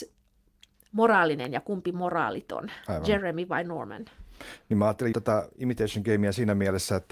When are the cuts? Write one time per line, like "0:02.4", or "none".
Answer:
0:05.1